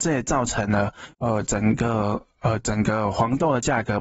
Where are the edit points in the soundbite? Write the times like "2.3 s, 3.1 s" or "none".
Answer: 1.1 s